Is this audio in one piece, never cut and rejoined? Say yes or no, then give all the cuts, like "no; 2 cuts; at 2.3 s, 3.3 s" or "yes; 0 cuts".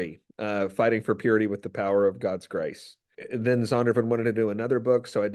yes; 0 cuts